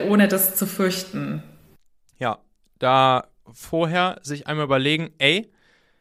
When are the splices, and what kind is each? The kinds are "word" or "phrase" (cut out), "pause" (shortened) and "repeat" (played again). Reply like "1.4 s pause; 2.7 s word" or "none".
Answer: 3.4 s word